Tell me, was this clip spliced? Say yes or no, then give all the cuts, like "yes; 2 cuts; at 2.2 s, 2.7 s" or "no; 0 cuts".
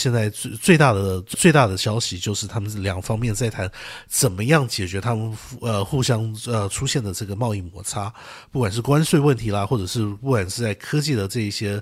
yes; 1 cut; at 1.3 s